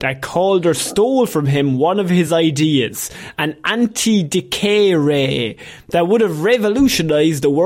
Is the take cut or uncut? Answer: uncut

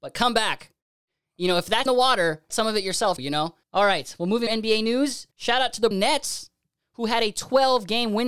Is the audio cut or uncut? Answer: cut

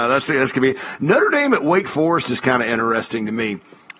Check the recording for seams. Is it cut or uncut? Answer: uncut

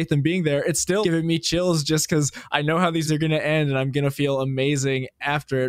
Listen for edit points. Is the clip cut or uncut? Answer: cut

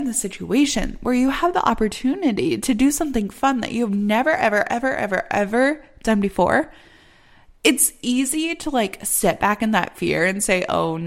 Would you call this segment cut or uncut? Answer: uncut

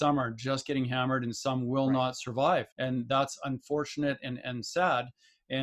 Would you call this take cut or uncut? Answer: cut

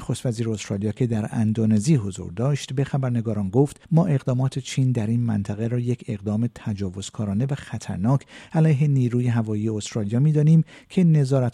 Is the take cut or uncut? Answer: cut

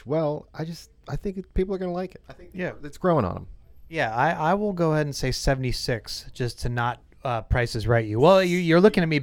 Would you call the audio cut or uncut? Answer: cut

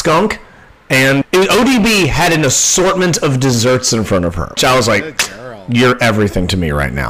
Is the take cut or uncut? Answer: cut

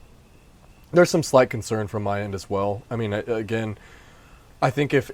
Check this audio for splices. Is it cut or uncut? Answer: uncut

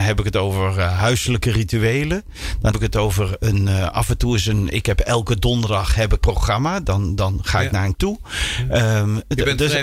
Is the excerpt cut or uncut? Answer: cut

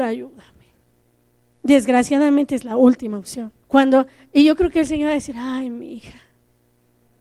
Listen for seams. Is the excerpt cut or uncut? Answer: cut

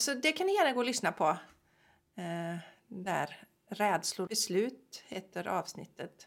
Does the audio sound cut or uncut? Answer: cut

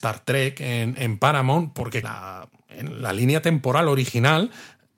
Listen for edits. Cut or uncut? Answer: cut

